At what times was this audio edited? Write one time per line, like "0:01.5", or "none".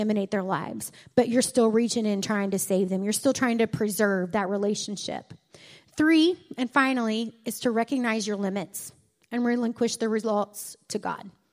none